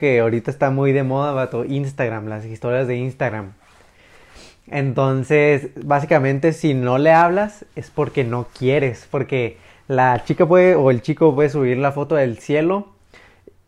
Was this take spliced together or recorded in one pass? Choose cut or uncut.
uncut